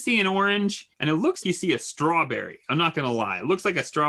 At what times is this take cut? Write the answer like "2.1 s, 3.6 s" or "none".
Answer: 0.9 s, 1.4 s